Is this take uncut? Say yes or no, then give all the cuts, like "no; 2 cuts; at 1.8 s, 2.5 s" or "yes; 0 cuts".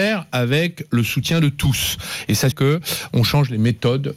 no; 1 cut; at 2.5 s